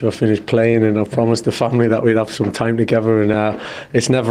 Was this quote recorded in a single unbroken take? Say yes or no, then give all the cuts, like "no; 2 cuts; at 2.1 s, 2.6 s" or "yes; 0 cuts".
yes; 0 cuts